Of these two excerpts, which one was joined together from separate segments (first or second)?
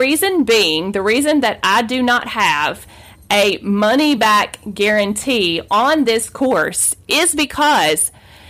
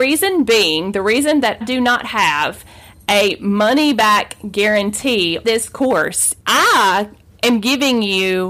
second